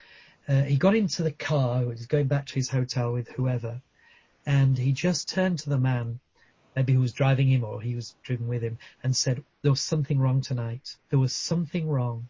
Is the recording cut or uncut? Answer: uncut